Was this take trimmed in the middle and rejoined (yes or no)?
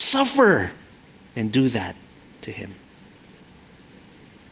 no